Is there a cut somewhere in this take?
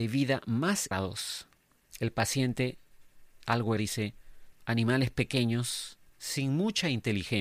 yes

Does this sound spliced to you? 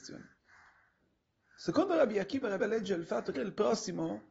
yes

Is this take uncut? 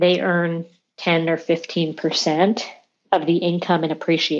no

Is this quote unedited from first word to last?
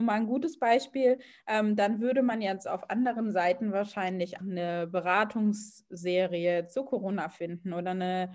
no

